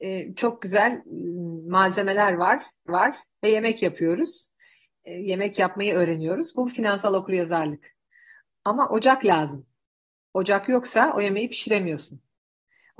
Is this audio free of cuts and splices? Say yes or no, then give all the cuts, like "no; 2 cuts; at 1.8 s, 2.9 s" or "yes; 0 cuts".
no; 1 cut; at 2.9 s